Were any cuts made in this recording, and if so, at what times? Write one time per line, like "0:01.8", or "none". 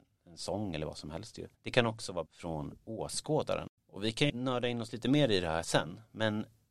0:01.5
0:02.3
0:03.8
0:04.3